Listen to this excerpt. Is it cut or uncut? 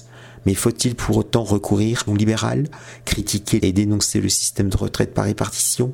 cut